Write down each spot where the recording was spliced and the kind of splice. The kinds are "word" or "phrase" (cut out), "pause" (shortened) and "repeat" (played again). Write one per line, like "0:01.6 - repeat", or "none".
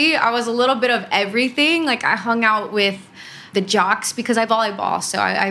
0:03.5 - word
0:04.5 - word